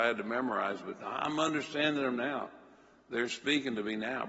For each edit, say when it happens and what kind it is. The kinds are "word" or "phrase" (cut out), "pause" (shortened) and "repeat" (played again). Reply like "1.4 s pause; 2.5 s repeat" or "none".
none